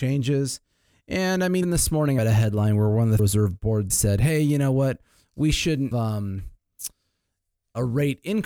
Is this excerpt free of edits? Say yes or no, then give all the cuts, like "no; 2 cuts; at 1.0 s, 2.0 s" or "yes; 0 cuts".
no; 5 cuts; at 1.6 s, 2.2 s, 3.2 s, 3.9 s, 5.9 s